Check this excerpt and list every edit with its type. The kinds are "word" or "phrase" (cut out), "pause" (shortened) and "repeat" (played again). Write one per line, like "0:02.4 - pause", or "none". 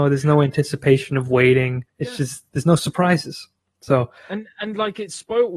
0:01.9 - pause